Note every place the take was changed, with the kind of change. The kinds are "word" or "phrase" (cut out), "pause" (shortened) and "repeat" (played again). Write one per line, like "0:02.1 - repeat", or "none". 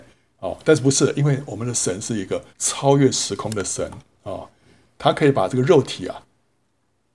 0:02.5 - pause